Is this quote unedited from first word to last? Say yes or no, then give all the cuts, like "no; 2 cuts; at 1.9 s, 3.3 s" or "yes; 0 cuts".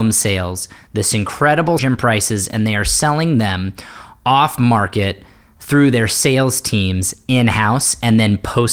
no; 1 cut; at 1.8 s